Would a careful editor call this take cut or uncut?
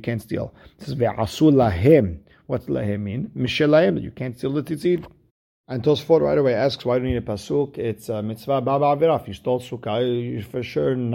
uncut